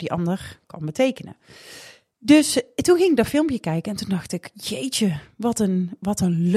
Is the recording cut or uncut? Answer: cut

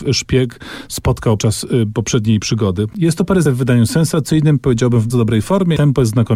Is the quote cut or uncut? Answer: cut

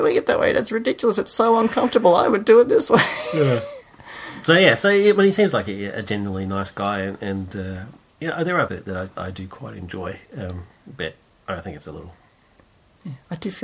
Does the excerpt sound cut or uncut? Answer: cut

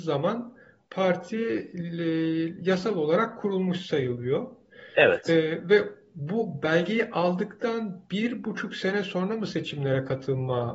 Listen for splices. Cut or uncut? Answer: uncut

